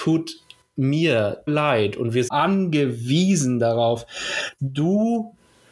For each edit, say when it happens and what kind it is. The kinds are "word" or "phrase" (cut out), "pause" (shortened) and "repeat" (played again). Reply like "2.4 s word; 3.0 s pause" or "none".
1.5 s phrase; 2.3 s phrase; 4.6 s word